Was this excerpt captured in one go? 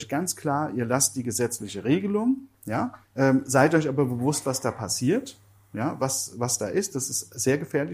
no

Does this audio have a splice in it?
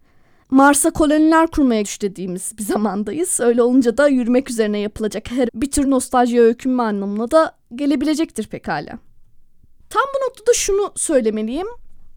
yes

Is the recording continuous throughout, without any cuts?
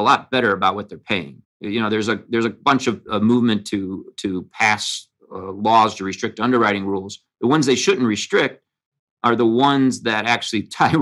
no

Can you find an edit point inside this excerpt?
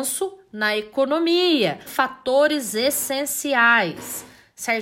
yes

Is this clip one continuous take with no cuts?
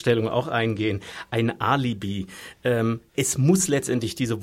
no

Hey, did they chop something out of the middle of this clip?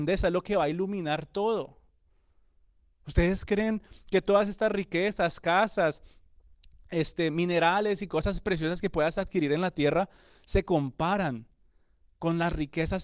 no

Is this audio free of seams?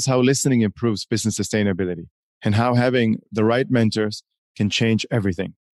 yes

